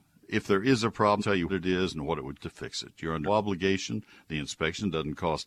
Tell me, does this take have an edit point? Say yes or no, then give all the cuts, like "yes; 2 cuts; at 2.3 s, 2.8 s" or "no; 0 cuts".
yes; 4 cuts; at 1.2 s, 1.5 s, 2.4 s, 3.3 s